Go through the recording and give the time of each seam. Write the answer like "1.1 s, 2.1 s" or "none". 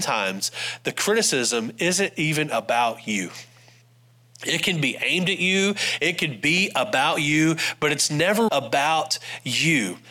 8.5 s